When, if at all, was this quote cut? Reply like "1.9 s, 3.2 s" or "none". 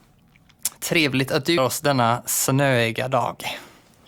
1.6 s

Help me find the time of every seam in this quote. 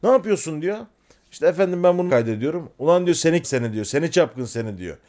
2.1 s, 3.4 s

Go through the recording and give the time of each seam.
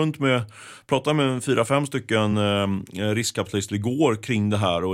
none

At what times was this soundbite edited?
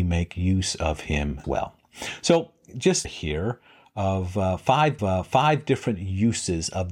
1.4 s, 3.0 s, 5.0 s

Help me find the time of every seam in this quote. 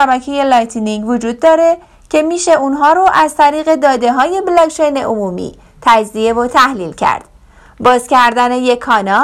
none

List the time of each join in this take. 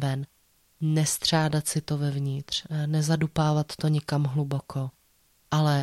none

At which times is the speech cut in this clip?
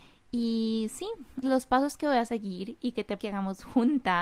1.4 s, 3.2 s

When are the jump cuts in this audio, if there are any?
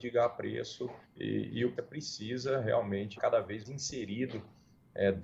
1.0 s, 1.8 s, 3.2 s, 3.6 s

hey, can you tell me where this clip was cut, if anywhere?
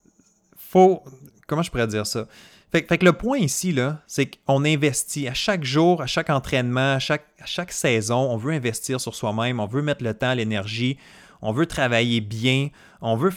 none

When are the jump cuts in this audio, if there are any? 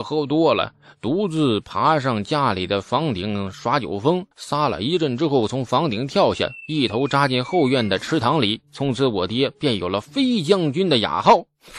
4.3 s

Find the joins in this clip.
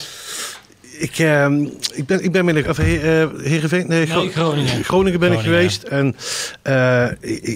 2.6 s

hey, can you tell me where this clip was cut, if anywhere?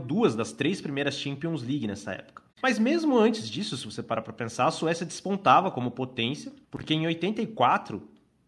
2.5 s, 6.6 s

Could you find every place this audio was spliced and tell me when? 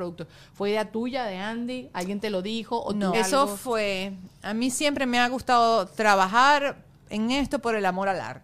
3.1 s

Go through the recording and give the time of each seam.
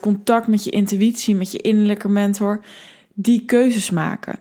none

